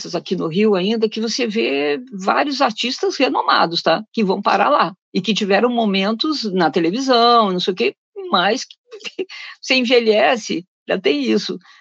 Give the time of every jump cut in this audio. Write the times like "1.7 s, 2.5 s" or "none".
5.0 s